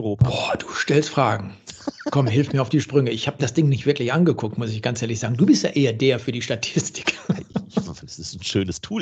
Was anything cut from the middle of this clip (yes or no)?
no